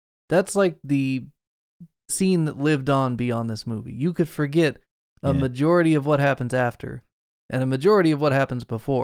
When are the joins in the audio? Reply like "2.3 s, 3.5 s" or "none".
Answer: 2.1 s